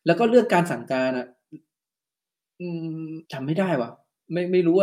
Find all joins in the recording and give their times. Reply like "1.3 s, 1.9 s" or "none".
3.2 s